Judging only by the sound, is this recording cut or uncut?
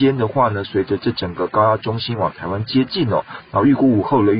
uncut